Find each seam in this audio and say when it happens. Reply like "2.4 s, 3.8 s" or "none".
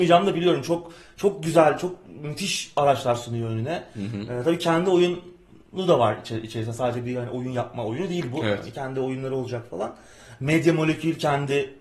none